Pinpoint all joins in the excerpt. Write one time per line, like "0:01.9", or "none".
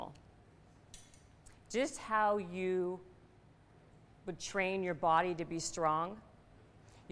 none